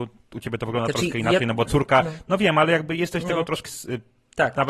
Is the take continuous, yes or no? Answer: no